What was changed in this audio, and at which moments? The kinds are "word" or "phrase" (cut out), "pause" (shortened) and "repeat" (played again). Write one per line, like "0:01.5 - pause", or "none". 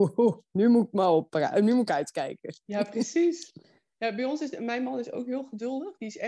none